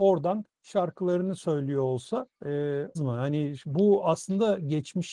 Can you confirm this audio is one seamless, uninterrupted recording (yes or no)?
no